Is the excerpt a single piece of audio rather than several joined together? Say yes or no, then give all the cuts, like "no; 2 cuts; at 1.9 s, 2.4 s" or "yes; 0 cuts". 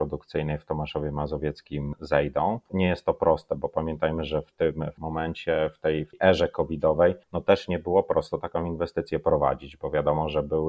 no; 1 cut; at 7.2 s